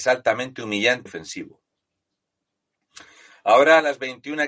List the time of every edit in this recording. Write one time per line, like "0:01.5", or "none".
0:01.1

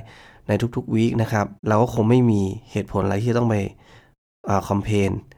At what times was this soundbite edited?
0:01.6

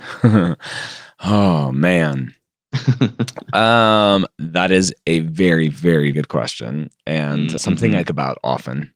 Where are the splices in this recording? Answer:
0:06.1
0:07.6
0:08.1

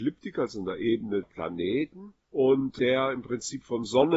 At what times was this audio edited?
0:01.2

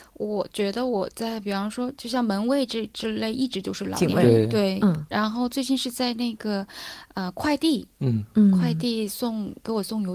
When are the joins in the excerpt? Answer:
none

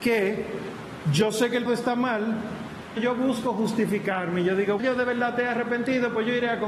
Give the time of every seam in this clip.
0:01.7
0:03.0
0:04.8

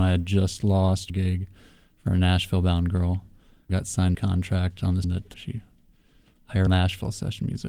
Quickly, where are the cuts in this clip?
0:01.1
0:03.7
0:04.1
0:05.0
0:05.3
0:06.7

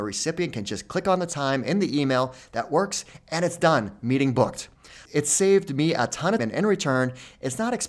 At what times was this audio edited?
0:06.4

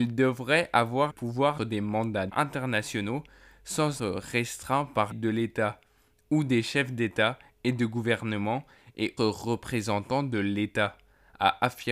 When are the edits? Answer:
0:01.1
0:01.6
0:02.3
0:04.0
0:05.1
0:09.2

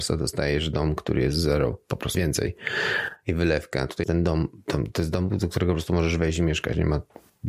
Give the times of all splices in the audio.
0:02.1
0:04.0

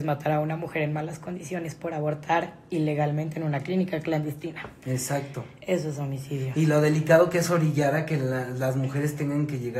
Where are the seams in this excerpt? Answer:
none

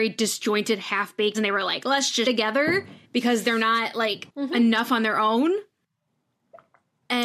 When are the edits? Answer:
0:01.3
0:02.3
0:03.0
0:04.3

